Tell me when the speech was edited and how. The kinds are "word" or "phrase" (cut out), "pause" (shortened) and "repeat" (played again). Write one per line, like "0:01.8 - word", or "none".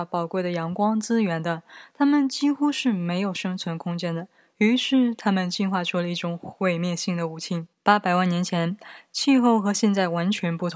0:07.7 - pause